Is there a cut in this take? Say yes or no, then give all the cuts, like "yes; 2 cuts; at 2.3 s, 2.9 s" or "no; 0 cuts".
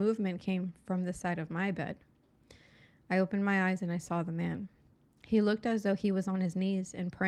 no; 0 cuts